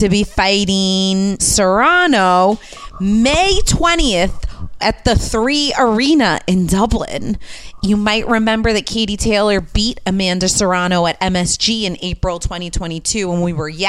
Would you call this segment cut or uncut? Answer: cut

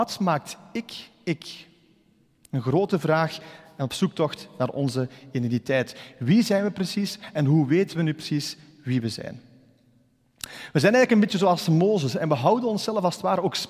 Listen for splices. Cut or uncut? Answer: uncut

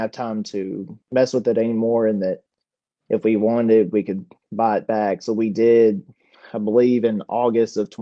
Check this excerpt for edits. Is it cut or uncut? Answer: uncut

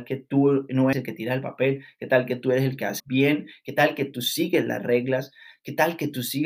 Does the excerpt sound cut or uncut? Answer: cut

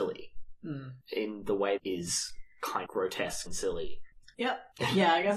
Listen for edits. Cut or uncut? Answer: cut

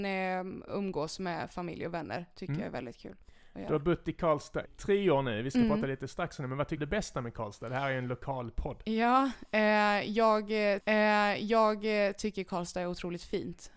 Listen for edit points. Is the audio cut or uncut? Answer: cut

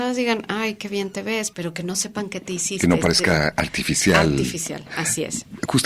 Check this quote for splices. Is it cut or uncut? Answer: cut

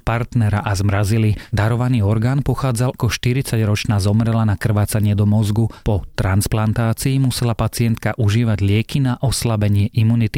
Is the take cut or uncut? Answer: cut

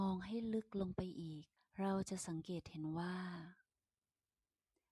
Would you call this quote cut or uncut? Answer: cut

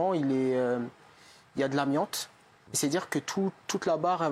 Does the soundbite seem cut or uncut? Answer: uncut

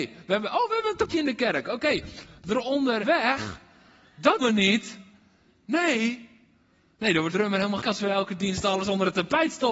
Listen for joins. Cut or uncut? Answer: cut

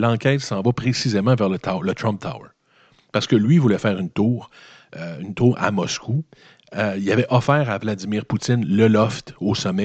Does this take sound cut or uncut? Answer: uncut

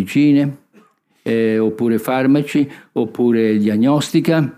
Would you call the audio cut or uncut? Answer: uncut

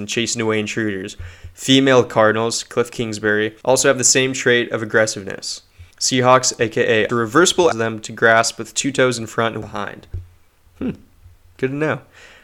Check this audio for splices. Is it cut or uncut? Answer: cut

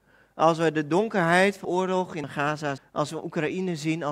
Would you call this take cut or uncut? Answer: cut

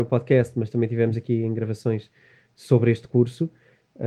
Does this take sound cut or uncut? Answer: uncut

